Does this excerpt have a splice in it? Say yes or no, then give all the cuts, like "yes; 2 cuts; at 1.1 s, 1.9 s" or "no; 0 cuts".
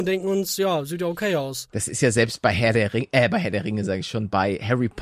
no; 0 cuts